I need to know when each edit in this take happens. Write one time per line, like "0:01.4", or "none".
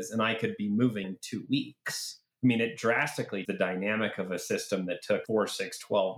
0:01.0
0:02.3
0:03.4